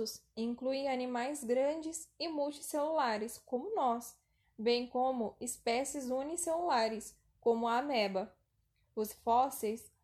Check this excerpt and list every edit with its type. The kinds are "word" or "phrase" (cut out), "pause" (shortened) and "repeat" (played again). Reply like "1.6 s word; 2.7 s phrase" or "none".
9.1 s word